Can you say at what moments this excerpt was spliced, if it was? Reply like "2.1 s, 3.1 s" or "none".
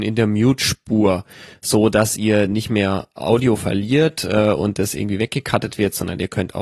none